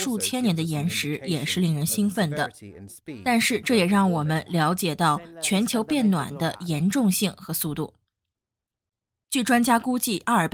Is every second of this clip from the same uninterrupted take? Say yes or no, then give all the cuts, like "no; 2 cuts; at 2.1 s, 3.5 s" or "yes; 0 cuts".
yes; 0 cuts